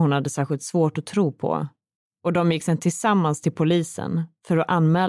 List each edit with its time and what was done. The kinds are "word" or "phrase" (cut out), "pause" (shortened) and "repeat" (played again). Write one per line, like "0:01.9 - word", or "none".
none